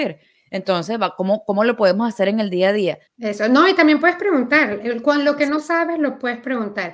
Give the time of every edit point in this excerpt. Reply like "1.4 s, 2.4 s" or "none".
3.1 s